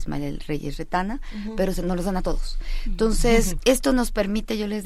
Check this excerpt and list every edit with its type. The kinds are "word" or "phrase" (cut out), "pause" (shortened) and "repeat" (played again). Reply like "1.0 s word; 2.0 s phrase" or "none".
3.6 s word

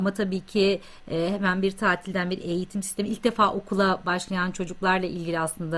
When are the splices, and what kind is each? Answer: none

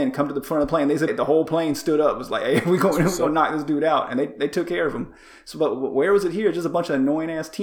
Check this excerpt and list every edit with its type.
1.1 s word

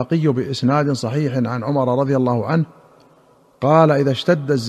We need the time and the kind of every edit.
none

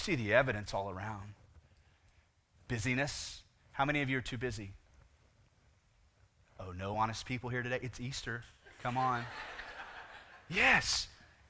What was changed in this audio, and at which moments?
none

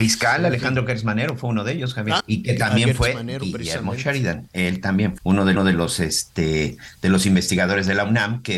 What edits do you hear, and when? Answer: 2.2 s word; 5.2 s word; 5.6 s repeat

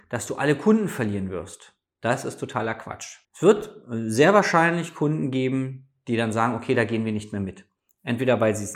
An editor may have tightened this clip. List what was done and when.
3.2 s pause

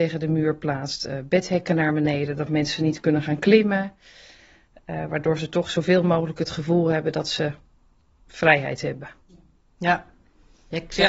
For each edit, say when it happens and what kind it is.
none

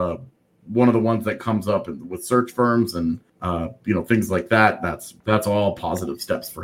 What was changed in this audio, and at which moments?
3.3 s pause; 5.2 s pause

